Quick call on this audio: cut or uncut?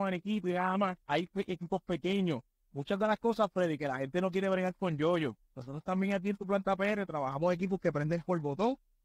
cut